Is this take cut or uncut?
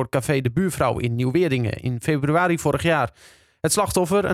uncut